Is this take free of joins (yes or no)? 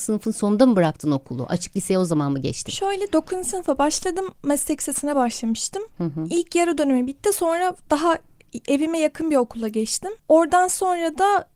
no